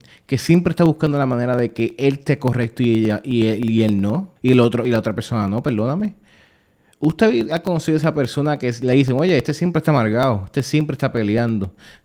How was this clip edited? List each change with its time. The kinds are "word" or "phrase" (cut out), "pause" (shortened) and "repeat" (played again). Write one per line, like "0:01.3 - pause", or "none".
0:04.4 - pause